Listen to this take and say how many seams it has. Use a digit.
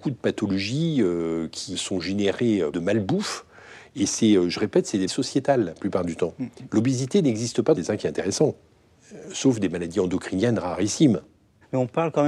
3